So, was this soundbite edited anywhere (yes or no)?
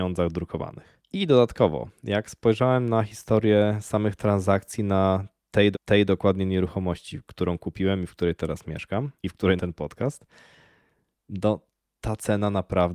yes